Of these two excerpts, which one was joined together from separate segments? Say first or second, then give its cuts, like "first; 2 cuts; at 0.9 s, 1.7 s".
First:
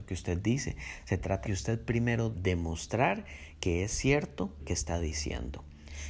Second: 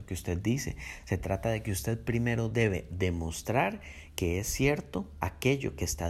first; 3 cuts; at 1.4 s, 2.3 s, 4.6 s